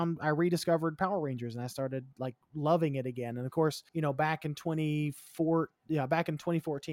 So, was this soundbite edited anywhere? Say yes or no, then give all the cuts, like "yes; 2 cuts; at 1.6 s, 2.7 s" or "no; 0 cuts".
yes; 1 cut; at 3.9 s